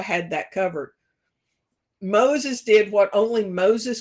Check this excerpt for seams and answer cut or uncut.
uncut